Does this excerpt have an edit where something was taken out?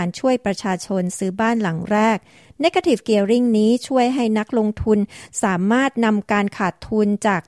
no; 0 cuts

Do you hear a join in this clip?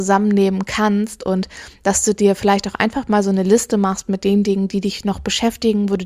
no; 0 cuts

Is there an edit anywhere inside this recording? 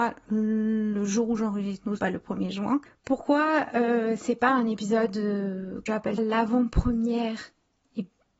yes; 3 cuts; at 2.0 s, 5.9 s, 6.2 s

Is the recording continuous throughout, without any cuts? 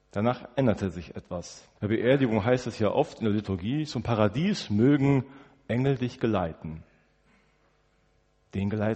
no; 1 cut; at 1.8 s

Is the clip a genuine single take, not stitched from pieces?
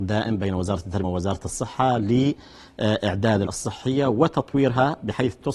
no; 2 cuts; at 1.0 s, 3.5 s

